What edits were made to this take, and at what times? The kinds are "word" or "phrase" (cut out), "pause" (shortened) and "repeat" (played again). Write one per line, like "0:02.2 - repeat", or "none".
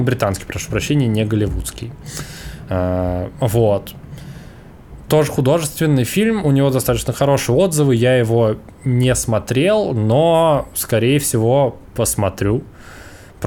0:11.9 - pause